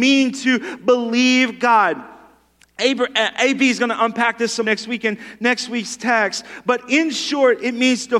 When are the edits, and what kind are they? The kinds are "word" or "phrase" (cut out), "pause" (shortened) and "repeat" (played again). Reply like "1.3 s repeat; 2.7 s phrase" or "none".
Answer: 4.6 s word